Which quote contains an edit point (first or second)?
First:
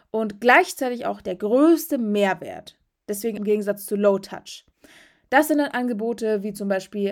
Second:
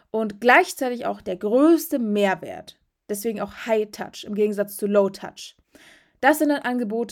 first